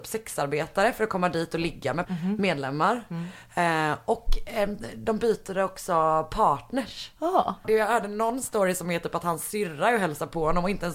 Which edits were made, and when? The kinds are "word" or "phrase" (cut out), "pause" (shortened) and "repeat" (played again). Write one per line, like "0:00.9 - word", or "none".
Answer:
0:02.0 - word